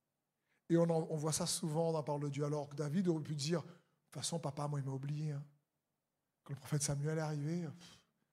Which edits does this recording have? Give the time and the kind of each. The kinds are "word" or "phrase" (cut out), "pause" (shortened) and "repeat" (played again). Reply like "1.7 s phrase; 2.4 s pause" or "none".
none